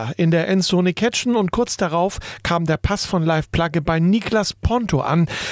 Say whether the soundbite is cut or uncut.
uncut